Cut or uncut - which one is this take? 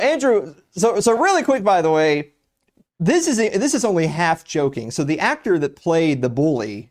uncut